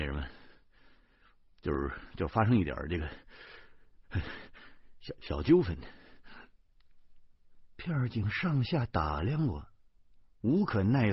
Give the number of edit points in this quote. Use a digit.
0